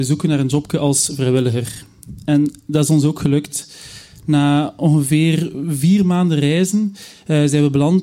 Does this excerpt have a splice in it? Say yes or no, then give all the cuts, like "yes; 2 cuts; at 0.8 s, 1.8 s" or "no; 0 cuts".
no; 0 cuts